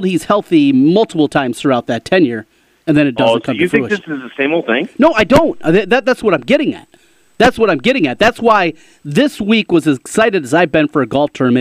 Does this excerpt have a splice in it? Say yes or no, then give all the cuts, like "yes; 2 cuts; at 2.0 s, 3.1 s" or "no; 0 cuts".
no; 0 cuts